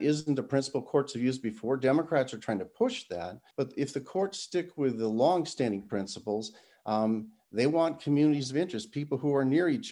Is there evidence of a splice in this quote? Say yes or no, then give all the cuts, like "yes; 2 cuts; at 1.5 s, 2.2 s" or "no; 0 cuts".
yes; 1 cut; at 3.5 s